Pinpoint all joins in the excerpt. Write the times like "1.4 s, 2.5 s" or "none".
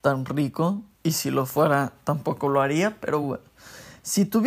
none